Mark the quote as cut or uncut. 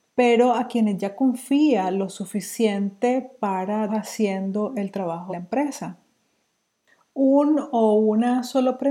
cut